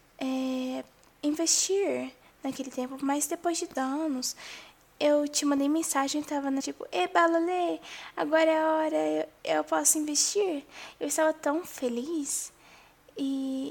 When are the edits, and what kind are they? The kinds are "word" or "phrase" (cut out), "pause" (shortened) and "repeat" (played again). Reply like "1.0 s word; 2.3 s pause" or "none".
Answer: 3.7 s word; 6.6 s phrase; 9.4 s pause